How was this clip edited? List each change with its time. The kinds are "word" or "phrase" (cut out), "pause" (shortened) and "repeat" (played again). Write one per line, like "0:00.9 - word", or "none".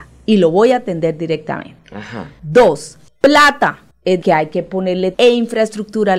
0:04.2 - word
0:05.1 - word